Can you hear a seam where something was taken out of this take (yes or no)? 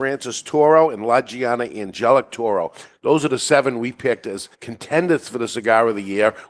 yes